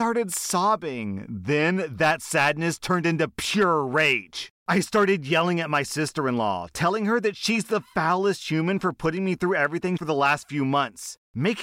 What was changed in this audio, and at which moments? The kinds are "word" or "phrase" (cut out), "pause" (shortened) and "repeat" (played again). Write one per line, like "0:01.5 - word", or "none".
0:10.0 - phrase